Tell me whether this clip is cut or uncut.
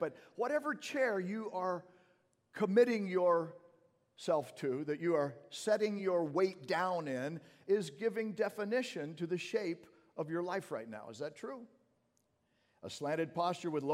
uncut